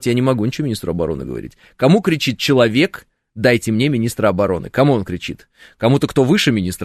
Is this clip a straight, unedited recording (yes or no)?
yes